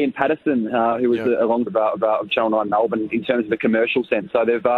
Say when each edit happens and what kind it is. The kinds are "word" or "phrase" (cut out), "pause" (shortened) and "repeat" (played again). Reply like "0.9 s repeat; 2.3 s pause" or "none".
1.7 s phrase; 2.0 s repeat

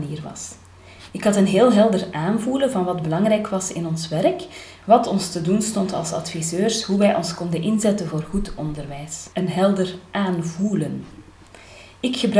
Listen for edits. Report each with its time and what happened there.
9.3 s pause

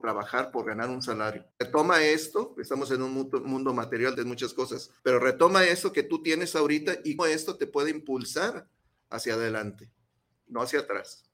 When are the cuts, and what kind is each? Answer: 1.5 s pause; 4.1 s word; 5.0 s pause; 7.2 s word

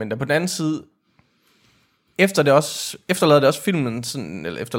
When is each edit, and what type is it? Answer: none

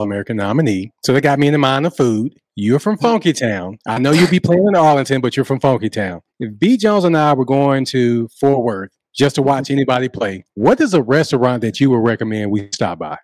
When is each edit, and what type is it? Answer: 0.9 s pause; 2.4 s pause; 3.8 s pause; 6.3 s pause; 9.1 s pause; 10.5 s pause

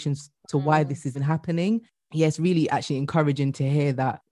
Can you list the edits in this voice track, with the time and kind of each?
1.1 s word

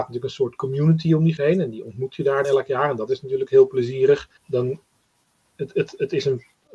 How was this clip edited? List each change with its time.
1.4 s word; 2.4 s word; 4.4 s pause

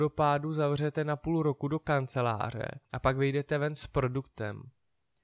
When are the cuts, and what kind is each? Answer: 2.8 s pause

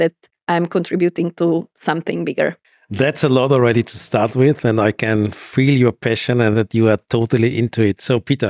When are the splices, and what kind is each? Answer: 2.6 s pause

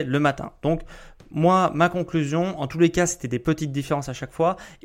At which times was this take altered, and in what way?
none

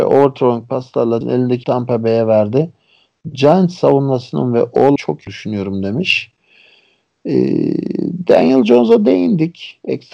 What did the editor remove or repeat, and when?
1.2 s word; 1.6 s word; 5.0 s word; 5.3 s word

